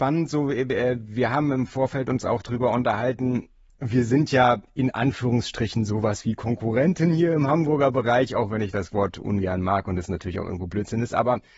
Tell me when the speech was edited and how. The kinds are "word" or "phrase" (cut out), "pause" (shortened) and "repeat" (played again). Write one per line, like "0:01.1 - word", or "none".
none